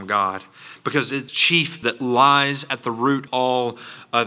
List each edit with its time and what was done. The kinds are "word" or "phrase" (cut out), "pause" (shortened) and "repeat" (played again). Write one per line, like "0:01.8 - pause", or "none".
0:01.3 - word
0:01.8 - word
0:03.3 - word

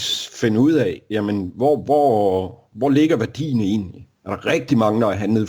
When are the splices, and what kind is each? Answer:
0:04.2 - pause

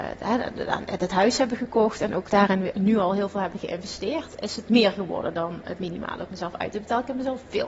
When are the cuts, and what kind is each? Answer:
none

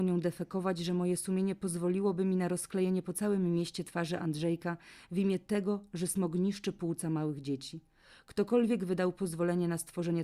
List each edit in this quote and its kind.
none

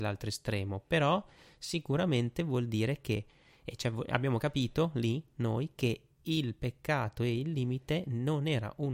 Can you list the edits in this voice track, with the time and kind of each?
none

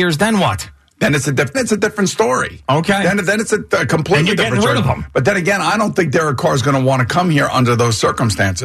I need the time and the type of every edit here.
0:01.5 - word

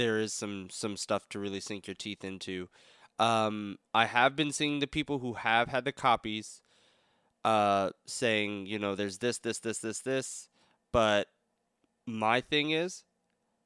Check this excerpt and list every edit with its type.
none

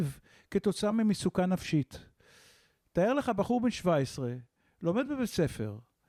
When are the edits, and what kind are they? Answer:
none

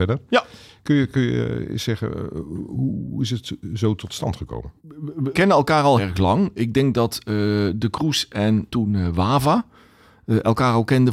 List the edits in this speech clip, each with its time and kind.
0:04.8 - pause
0:05.3 - word
0:06.0 - word
0:08.7 - word

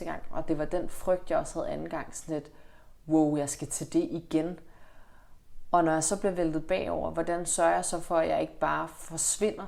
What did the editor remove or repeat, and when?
0:03.0 - pause

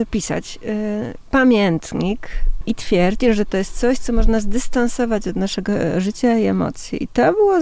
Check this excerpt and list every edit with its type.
0:02.6 - word

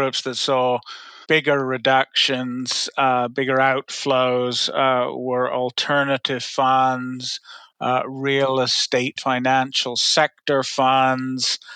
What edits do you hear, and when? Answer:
0:01.2 - word
0:09.2 - word

